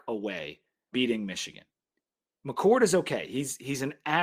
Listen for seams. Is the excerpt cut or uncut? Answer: cut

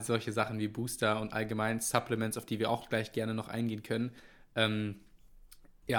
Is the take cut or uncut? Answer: uncut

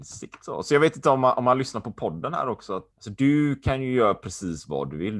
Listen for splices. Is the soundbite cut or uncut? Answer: cut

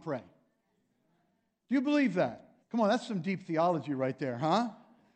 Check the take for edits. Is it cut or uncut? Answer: cut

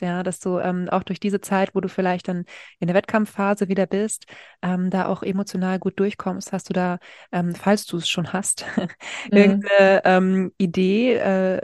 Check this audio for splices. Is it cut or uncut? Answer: uncut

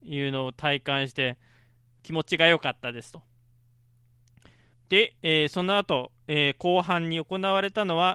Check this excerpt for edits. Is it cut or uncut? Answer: cut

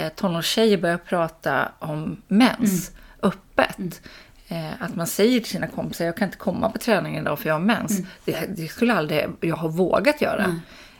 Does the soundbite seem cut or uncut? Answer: uncut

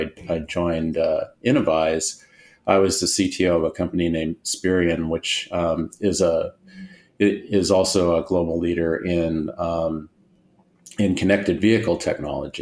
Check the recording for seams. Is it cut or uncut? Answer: uncut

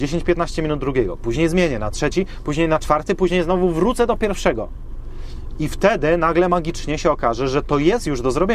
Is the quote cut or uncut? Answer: uncut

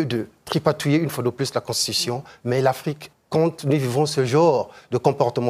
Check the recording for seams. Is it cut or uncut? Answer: cut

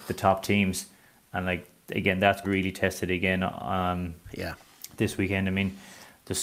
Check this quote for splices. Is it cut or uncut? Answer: cut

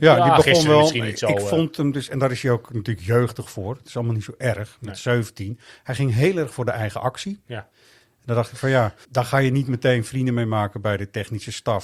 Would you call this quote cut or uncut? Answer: cut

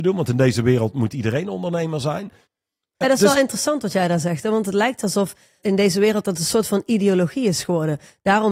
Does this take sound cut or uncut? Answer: cut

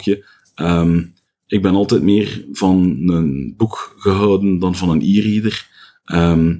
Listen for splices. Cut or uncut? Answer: uncut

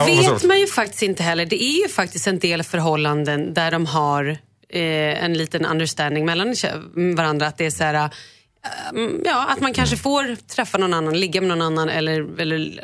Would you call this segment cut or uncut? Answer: uncut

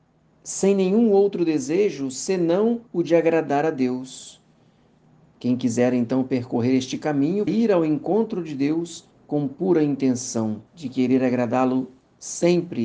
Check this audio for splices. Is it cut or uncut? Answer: cut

